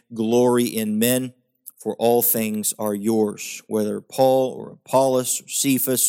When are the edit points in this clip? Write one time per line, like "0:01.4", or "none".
none